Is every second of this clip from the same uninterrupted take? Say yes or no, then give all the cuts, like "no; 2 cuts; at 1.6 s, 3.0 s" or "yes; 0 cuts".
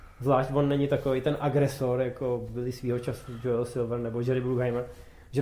yes; 0 cuts